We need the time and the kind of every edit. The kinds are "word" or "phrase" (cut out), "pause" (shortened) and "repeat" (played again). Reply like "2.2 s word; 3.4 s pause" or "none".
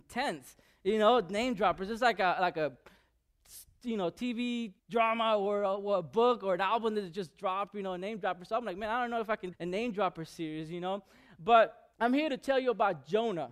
4.8 s pause; 9.5 s phrase; 11.9 s pause